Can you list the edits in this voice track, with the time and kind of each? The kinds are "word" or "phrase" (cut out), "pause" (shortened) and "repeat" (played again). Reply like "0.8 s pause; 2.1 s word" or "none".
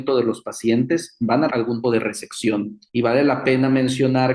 1.5 s word; 1.8 s word; 2.9 s pause